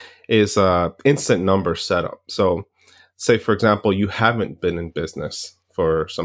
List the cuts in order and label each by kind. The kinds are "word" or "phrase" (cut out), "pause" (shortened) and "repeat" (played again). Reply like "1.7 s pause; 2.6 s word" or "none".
none